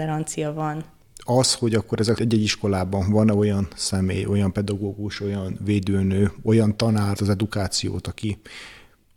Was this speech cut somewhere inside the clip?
yes; 2 cuts; at 2.2 s, 7.1 s

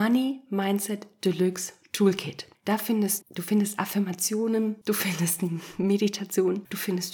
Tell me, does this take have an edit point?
yes; 1 cut; at 3.2 s

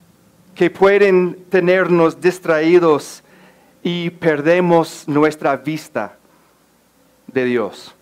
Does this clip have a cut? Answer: no; 0 cuts

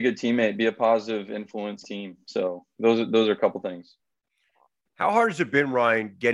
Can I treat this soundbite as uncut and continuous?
no; 1 cut; at 1.8 s

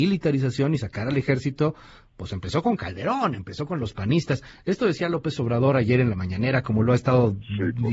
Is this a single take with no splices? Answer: yes; 0 cuts

